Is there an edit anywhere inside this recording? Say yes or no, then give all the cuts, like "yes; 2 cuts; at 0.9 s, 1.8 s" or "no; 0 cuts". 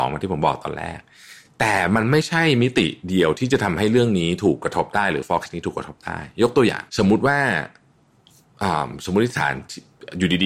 yes; 2 cuts; at 5.5 s, 6.9 s